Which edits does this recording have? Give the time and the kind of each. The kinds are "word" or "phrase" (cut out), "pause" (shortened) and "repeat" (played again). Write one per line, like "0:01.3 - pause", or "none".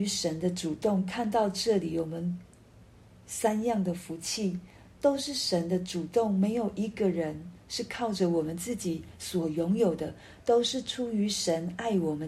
none